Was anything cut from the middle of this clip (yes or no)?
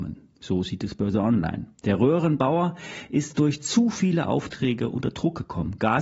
yes